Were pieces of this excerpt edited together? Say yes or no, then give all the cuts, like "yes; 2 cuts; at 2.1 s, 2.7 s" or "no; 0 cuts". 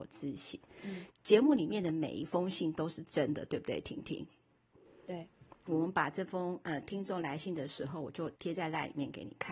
yes; 1 cut; at 1.1 s